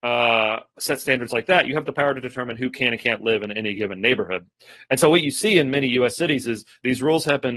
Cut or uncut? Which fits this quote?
uncut